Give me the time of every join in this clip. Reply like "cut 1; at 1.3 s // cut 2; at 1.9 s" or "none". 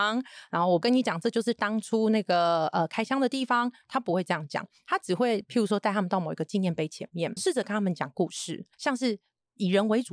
cut 1; at 7.4 s // cut 2; at 8.7 s